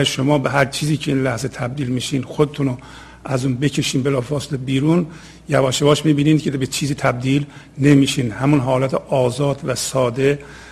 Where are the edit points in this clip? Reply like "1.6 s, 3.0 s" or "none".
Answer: none